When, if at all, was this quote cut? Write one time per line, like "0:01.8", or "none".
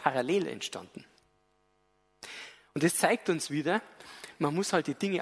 none